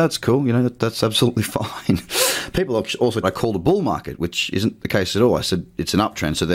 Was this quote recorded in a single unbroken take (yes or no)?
no